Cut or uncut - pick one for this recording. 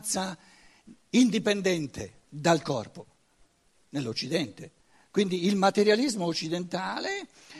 cut